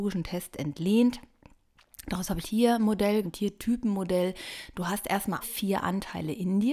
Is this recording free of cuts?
no; 3 cuts; at 2.4 s, 3.2 s, 5.4 s

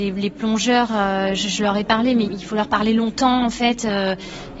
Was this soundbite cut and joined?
yes; 1 cut; at 2.3 s

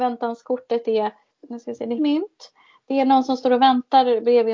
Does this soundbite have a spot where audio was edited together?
yes; 2 cuts; at 1.3 s, 2.0 s

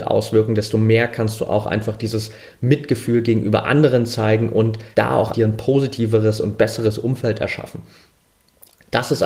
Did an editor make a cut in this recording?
yes; 2 cuts; at 4.9 s, 5.3 s

